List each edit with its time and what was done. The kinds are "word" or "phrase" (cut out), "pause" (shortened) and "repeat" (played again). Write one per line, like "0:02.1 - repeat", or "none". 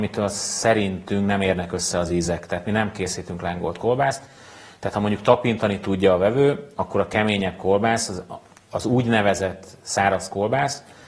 none